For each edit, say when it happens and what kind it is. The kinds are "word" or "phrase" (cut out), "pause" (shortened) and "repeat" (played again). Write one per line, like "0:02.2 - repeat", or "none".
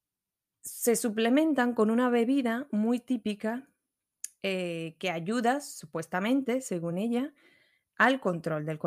none